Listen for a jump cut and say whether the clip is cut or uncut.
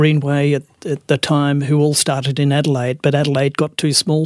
uncut